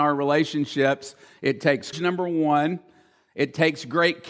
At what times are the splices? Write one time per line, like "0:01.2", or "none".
0:01.9